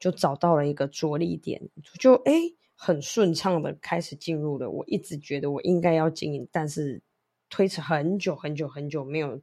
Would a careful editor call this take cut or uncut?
uncut